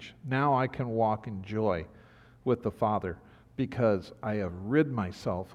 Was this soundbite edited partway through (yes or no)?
no